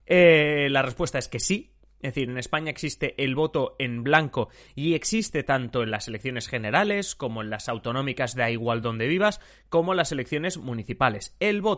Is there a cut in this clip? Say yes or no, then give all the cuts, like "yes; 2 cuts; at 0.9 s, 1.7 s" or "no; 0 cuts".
no; 0 cuts